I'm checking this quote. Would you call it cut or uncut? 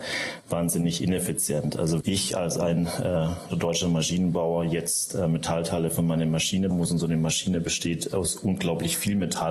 cut